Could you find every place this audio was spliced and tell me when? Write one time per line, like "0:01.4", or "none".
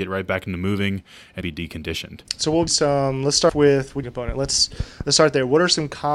0:01.4
0:02.3
0:02.7
0:03.5
0:04.0